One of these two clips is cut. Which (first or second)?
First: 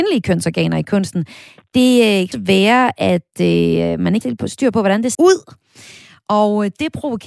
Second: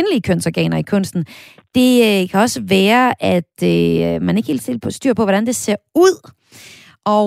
first